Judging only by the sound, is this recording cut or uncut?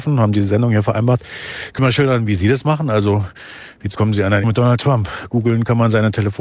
cut